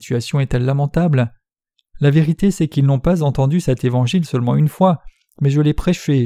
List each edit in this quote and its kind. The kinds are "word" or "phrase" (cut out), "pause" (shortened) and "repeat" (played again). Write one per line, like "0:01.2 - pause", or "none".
none